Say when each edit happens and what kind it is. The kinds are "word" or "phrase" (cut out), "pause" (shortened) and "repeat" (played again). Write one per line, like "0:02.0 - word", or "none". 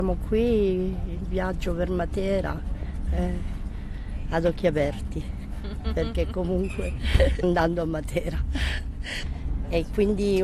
0:01.3 - word
0:03.1 - phrase
0:07.4 - word